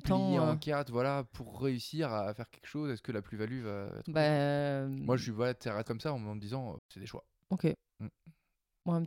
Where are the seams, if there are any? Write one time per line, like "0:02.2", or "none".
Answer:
0:05.8
0:06.8